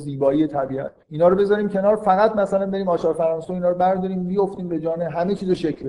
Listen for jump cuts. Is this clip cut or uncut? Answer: cut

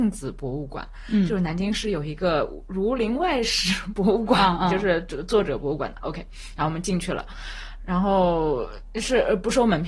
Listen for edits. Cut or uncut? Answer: uncut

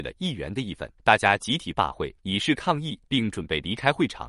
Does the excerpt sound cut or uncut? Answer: cut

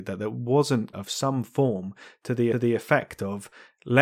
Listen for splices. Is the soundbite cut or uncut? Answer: cut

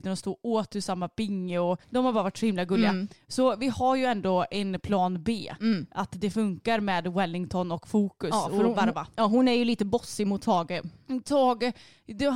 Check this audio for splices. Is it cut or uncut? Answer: cut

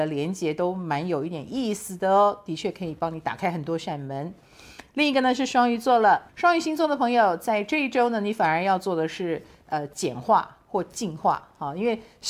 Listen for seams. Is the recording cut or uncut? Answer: cut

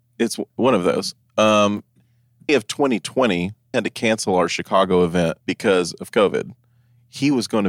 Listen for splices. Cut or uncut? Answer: cut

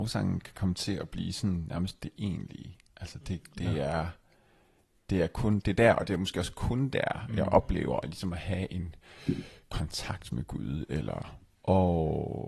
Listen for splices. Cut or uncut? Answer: uncut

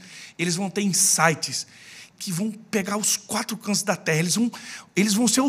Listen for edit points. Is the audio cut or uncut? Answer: cut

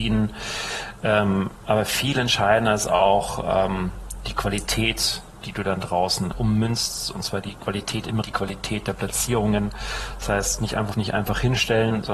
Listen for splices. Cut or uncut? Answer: cut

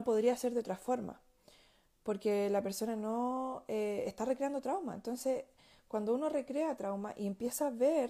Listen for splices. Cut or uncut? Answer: uncut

